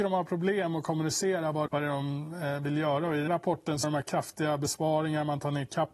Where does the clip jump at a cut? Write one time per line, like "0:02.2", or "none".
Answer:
0:01.7
0:03.3
0:03.8

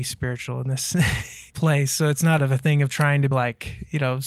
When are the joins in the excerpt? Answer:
0:01.5
0:02.4
0:03.3

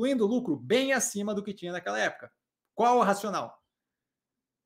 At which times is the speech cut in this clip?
none

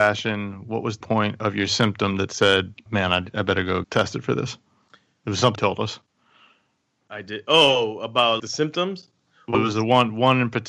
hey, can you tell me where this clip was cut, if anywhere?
0:01.0
0:02.9
0:03.8
0:05.5
0:08.4
0:09.5

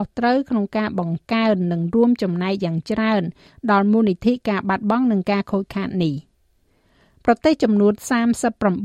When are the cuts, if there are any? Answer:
none

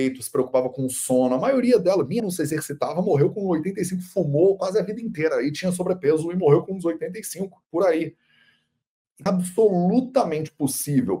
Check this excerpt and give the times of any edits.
0:02.2
0:07.7
0:09.3

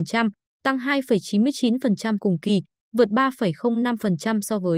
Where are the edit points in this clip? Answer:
0:02.2

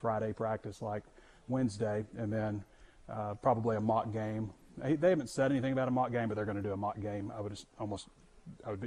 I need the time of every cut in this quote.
none

